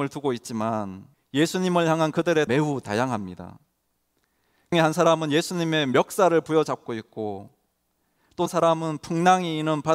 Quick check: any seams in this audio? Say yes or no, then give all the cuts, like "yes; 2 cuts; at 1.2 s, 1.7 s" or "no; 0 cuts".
yes; 4 cuts; at 1.1 s, 2.5 s, 4.7 s, 8.5 s